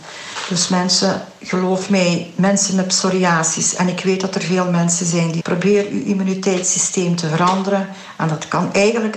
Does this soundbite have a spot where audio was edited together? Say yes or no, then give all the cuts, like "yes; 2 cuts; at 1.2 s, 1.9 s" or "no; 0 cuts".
yes; 1 cut; at 5.4 s